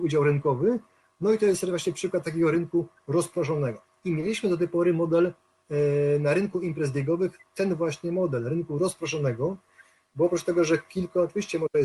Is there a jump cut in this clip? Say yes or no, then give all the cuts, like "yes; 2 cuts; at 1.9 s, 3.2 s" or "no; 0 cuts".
no; 0 cuts